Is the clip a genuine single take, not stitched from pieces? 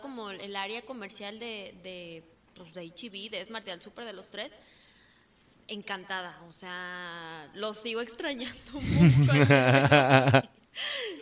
yes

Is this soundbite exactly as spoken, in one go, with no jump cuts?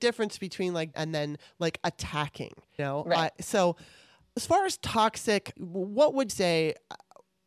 no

